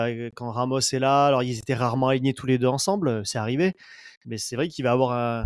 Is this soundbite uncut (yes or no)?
no